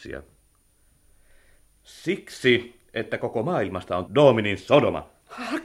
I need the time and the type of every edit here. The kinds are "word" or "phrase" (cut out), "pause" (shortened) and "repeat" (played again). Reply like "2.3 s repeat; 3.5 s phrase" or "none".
4.1 s word